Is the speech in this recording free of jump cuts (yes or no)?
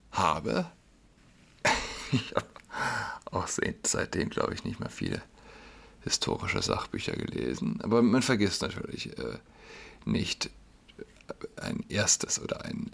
yes